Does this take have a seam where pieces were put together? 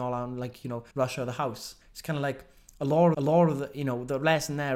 yes; 3 cuts; at 0.9 s, 1.8 s, 3.1 s

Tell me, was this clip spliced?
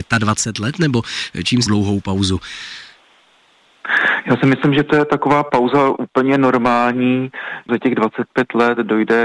yes; 2 cuts; at 1.7 s, 7.7 s

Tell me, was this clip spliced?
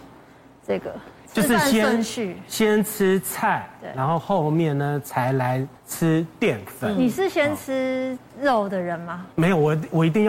yes; 2 cuts; at 5.8 s, 9.3 s

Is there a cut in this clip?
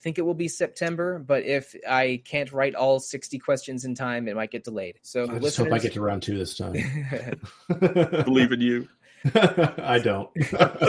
yes; 1 cut; at 5.0 s

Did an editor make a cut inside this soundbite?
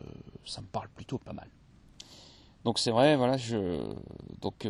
no; 0 cuts

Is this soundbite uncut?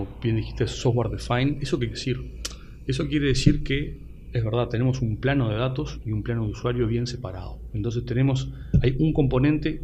no; 1 cut; at 1.9 s

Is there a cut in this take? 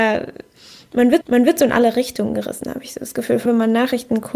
yes; 2 cuts; at 1.2 s, 3.5 s

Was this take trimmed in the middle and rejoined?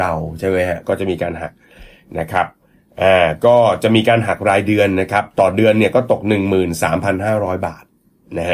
no; 0 cuts

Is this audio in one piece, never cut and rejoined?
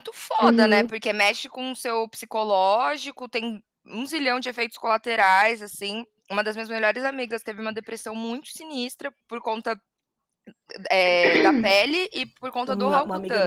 no; 1 cut; at 9.2 s

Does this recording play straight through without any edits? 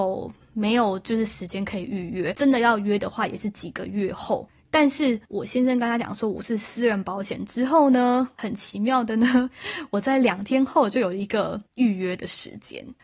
no; 1 cut; at 11.7 s

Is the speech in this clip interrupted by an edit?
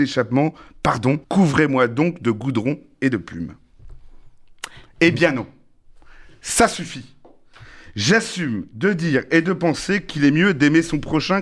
yes; 1 cut; at 1.2 s

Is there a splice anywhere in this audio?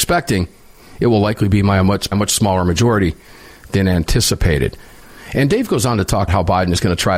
yes; 2 cuts; at 2.1 s, 6.3 s

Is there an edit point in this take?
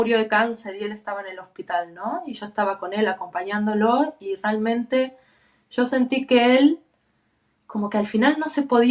no; 0 cuts

